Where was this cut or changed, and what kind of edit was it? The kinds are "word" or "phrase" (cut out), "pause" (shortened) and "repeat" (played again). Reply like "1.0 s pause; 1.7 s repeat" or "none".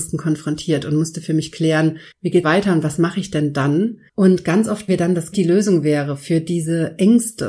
2.1 s pause; 2.4 s phrase; 4.1 s pause; 4.9 s word; 5.3 s word

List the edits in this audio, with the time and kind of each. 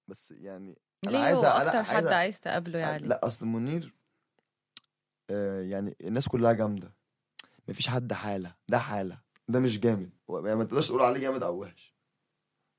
8.6 s pause; 9.3 s pause; 10.2 s pause

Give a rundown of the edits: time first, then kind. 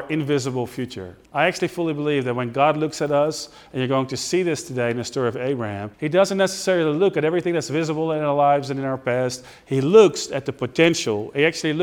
1.2 s pause; 5.9 s pause

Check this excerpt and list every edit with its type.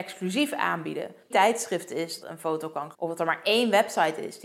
1.3 s phrase; 2.2 s word; 2.9 s word

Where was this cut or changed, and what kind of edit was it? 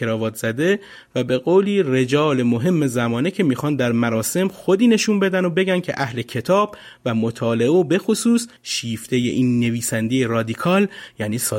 8.6 s pause

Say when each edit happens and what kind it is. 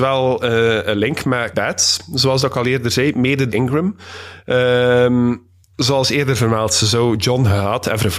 1.5 s word; 3.5 s word; 5.7 s pause

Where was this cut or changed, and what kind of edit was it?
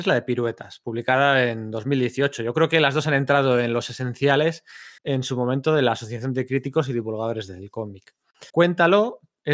5.0 s pause; 8.5 s pause

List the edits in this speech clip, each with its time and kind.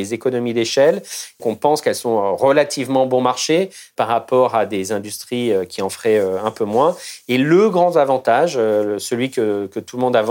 1.4 s word

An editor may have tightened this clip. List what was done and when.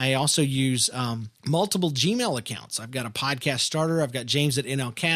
1.4 s pause

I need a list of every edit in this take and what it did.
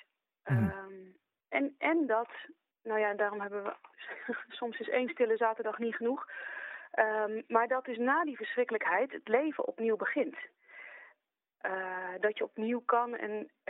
2.7 s pause; 3.9 s pause

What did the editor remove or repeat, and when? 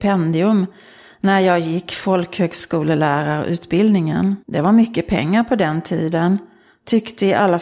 4.4 s pause

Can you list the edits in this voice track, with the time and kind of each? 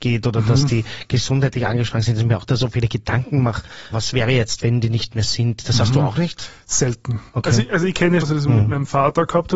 3.9 s word; 8.2 s word

